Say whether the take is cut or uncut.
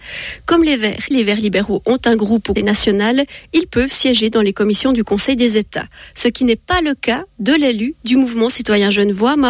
cut